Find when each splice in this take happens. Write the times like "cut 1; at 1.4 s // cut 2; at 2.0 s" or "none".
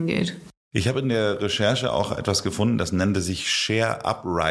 none